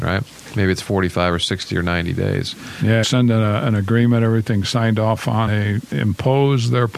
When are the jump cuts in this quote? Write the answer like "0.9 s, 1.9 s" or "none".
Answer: 3.0 s, 5.5 s